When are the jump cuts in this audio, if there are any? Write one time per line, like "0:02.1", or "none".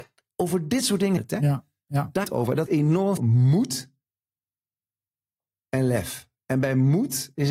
0:01.2
0:02.2
0:02.7
0:03.2